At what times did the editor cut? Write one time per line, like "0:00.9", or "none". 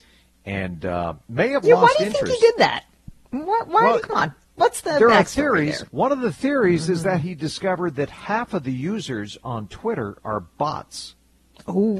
0:01.2
0:04.0
0:05.9